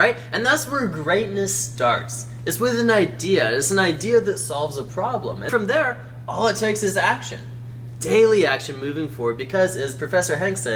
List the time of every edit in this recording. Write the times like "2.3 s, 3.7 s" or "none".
5.5 s

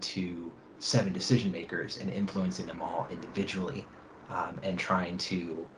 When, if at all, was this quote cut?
none

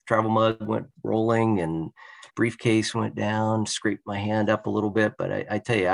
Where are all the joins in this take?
2.3 s

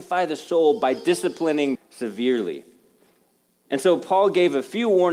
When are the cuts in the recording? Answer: 1.8 s

